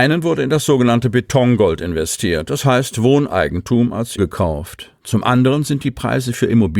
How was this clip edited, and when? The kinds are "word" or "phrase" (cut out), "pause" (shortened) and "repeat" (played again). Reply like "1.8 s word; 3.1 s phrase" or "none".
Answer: 4.2 s word

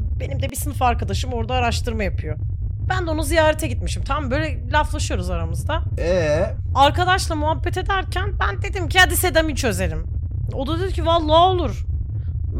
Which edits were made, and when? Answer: none

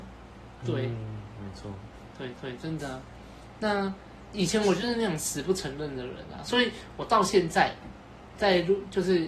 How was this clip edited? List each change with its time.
2.4 s repeat

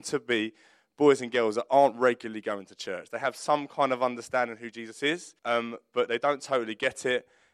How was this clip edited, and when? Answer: 5.4 s pause

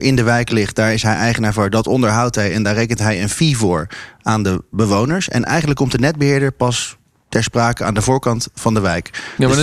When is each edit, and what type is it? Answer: none

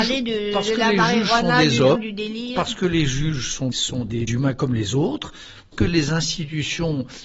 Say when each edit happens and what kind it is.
2.0 s word; 3.7 s word; 4.3 s word; 5.7 s word

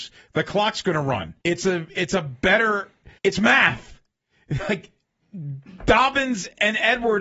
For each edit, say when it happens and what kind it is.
1.4 s pause; 3.2 s pause

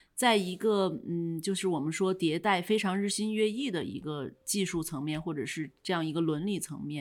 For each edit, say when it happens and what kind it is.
5.8 s pause

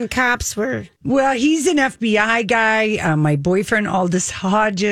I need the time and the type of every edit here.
1.0 s pause

